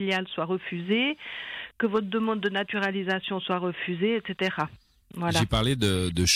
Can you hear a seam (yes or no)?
no